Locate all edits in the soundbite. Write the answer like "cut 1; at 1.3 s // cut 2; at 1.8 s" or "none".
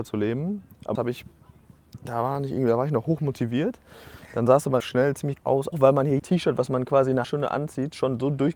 cut 1; at 0.9 s // cut 2; at 4.8 s // cut 3; at 5.4 s // cut 4; at 5.7 s // cut 5; at 6.2 s // cut 6; at 7.2 s